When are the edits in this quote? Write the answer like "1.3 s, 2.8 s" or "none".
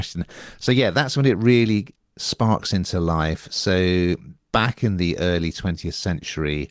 4.4 s